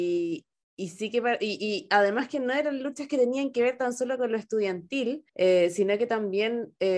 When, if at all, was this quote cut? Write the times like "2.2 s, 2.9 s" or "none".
5.3 s